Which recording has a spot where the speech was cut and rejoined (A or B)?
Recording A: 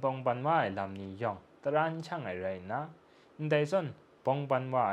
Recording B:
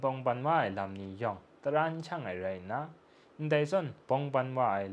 B